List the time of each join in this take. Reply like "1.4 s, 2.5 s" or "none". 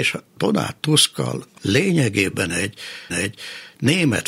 1.6 s, 3.1 s